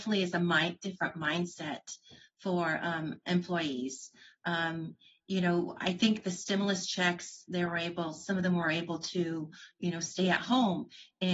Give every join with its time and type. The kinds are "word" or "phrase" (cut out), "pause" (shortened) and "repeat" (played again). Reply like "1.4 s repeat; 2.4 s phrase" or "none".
none